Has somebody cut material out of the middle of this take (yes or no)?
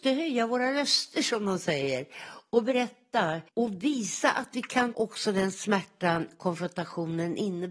yes